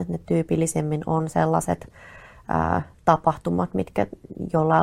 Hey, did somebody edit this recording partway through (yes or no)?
yes